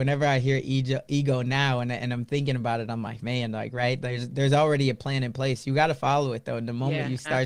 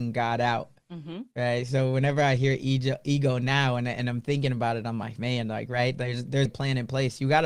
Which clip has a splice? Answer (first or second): second